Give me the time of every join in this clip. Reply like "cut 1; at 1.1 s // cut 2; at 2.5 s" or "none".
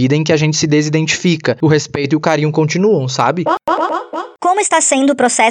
none